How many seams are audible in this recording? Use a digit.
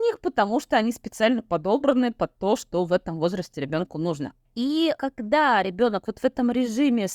0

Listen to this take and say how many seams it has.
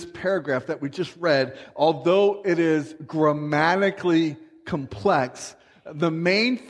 0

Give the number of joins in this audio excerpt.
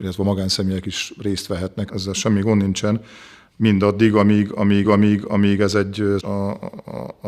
3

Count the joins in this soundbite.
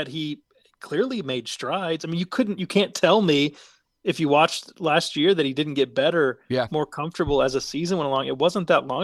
0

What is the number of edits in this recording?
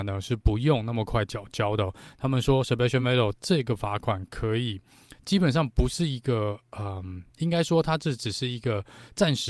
0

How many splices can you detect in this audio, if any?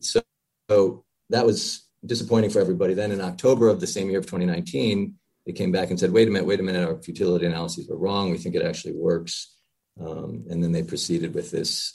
0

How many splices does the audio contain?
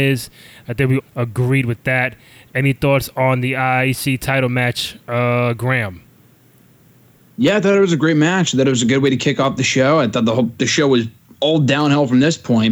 1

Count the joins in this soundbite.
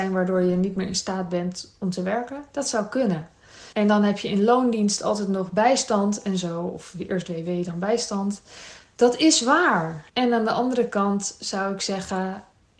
2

